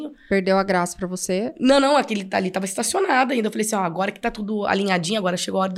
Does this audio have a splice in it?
no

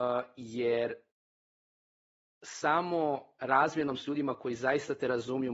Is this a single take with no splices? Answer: yes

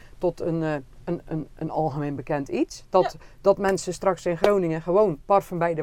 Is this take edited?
no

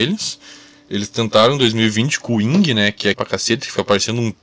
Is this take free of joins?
no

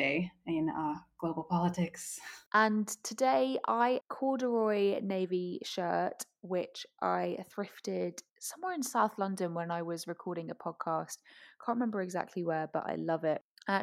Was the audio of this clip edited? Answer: yes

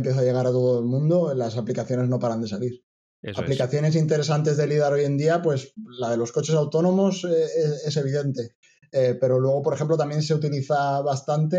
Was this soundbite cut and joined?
no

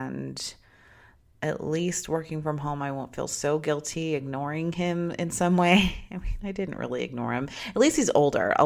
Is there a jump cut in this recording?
no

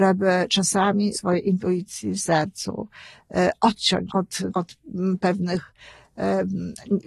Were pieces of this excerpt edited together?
yes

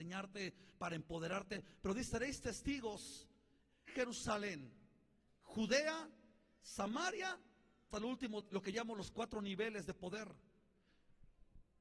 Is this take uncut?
no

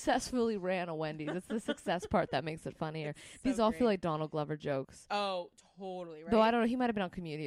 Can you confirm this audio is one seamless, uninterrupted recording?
yes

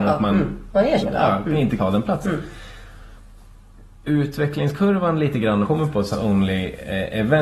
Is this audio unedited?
no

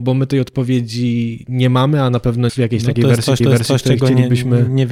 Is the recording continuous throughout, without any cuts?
no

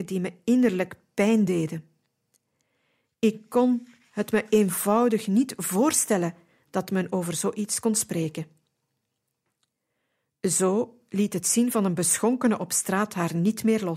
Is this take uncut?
yes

